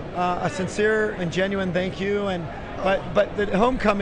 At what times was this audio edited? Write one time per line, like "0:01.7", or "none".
0:01.2